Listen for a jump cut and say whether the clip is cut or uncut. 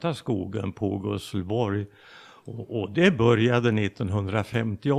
uncut